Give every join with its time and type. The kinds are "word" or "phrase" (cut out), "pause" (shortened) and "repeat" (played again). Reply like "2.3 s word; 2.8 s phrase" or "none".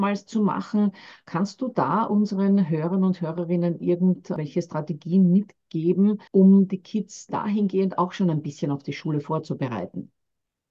6.3 s pause